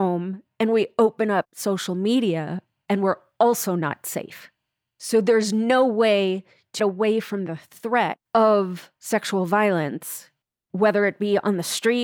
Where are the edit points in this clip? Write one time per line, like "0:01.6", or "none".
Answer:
0:06.8
0:08.3
0:10.4

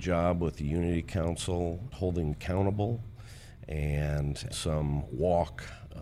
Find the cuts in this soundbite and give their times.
0:01.9
0:02.3
0:04.5

